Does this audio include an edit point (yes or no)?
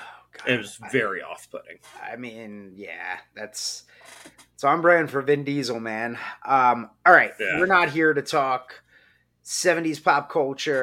no